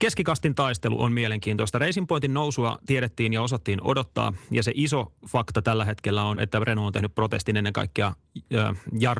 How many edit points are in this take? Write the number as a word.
one